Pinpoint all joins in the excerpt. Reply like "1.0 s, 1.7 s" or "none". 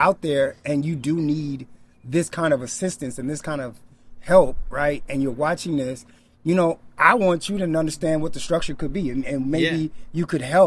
none